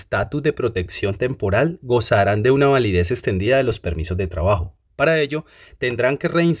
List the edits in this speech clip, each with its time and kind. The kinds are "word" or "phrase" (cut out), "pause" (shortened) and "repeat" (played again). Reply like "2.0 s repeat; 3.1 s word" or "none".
none